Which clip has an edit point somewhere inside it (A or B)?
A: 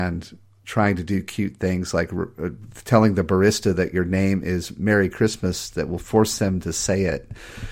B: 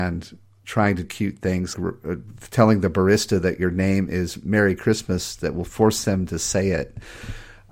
B